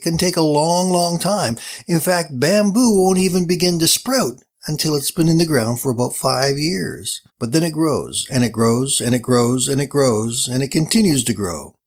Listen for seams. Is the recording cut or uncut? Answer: cut